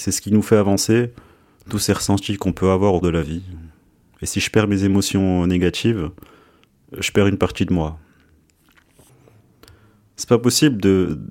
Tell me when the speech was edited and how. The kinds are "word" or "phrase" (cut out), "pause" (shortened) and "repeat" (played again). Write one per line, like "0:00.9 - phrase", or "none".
0:03.0 - word